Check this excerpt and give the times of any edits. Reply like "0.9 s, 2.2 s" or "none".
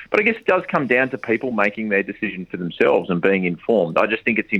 none